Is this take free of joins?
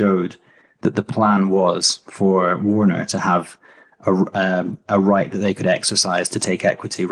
yes; 0 cuts

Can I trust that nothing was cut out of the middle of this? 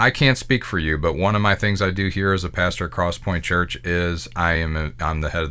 yes; 0 cuts

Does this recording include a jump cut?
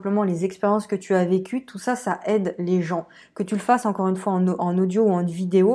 no; 0 cuts

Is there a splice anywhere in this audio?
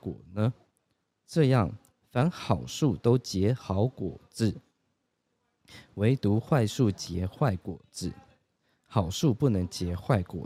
no; 0 cuts

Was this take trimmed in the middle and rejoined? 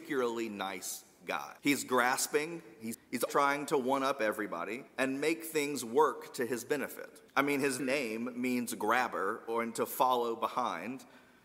yes; 6 cuts; at 1.6 s, 2.9 s, 3.3 s, 4.9 s, 7.3 s, 7.8 s

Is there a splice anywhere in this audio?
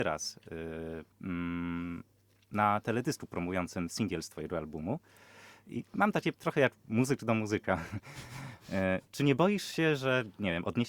yes; 2 cuts; at 1.1 s, 6.3 s

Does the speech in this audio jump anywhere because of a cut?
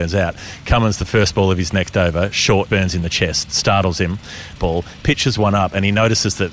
yes; 2 cuts; at 2.7 s, 4.6 s

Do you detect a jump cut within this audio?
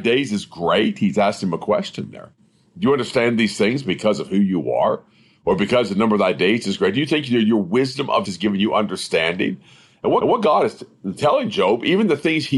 yes; 2 cuts; at 8.3 s, 10.2 s

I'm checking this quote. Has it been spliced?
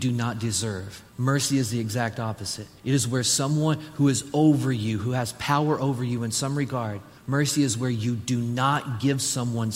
yes; 3 cuts; at 1.1 s, 2.8 s, 7.2 s

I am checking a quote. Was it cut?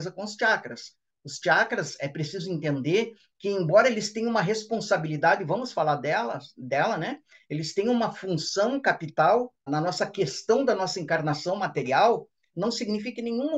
yes; 1 cut; at 9.7 s

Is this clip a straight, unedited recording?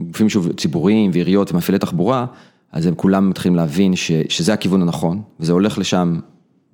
yes; 0 cuts

